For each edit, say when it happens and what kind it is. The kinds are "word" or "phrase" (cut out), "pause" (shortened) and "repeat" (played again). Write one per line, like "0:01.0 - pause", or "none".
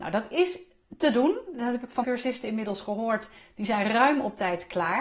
0:02.0 - word

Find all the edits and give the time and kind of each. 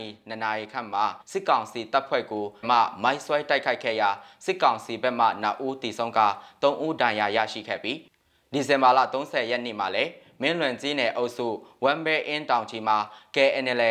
0:01.2 - pause
0:02.6 - word

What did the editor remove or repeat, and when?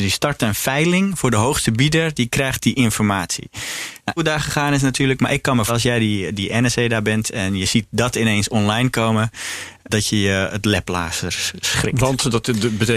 0:04.2 - phrase
0:05.7 - word
0:09.9 - word

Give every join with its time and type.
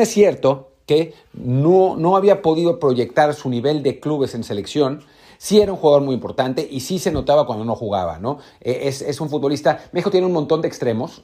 none

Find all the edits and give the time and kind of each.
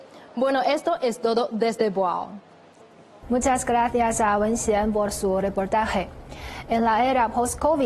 none

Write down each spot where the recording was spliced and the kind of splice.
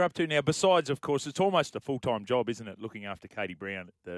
none

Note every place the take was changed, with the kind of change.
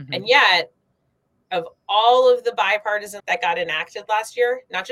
0:03.2 - word

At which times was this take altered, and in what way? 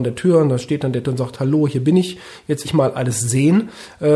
0:01.0 - word
0:02.6 - word

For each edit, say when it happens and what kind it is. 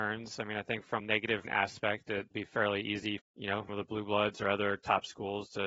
0:01.0 - word
0:01.4 - word
0:02.3 - word
0:03.2 - word
0:03.7 - word

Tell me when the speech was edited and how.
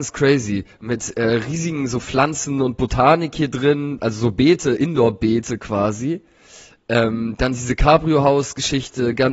none

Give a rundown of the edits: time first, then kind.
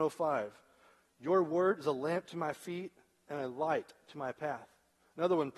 none

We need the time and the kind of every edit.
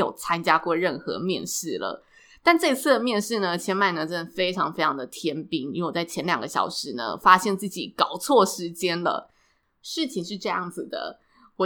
none

